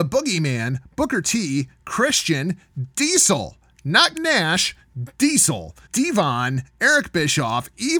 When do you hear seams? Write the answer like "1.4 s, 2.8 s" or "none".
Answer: 4.1 s, 5.8 s